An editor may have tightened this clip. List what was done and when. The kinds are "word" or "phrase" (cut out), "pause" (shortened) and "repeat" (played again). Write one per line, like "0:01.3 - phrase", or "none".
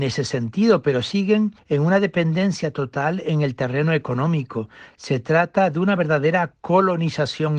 none